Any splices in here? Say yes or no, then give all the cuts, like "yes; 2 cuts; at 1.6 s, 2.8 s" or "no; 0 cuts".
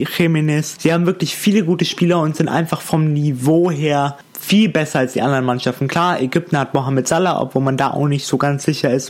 no; 0 cuts